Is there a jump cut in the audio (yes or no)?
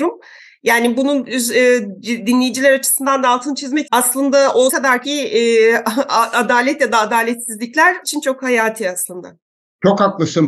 yes